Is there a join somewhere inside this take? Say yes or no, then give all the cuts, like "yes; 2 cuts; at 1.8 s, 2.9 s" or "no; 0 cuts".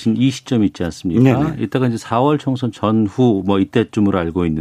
no; 0 cuts